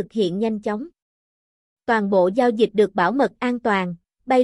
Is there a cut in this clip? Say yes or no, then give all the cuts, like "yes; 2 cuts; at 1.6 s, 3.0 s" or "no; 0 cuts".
no; 0 cuts